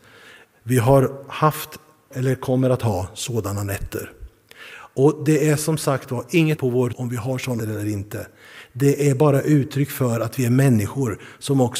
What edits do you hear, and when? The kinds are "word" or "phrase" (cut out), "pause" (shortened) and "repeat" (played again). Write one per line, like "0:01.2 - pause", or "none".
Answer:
0:02.1 - word
0:06.6 - word
0:06.9 - word
0:07.6 - word